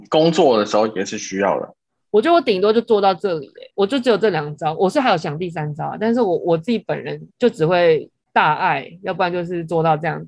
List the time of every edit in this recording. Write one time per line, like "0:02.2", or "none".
0:01.9
0:03.7
0:07.3